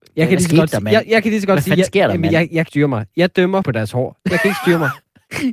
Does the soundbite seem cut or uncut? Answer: cut